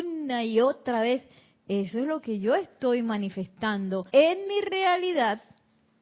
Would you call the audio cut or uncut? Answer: cut